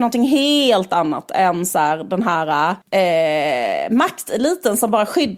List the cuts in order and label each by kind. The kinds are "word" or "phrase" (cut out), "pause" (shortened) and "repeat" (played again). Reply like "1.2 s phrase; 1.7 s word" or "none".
2.8 s pause